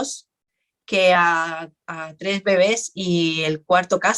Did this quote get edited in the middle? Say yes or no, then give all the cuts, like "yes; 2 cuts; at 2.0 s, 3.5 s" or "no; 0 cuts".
no; 0 cuts